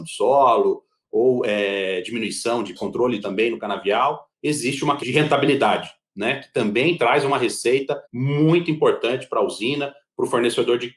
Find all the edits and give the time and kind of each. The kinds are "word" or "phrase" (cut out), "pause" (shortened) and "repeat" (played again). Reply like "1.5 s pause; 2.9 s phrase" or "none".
2.8 s word; 3.2 s phrase; 4.3 s pause; 5.0 s word; 8.0 s pause